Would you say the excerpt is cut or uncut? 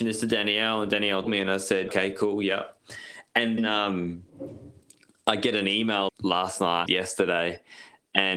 cut